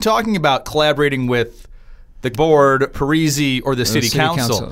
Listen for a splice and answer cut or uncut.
cut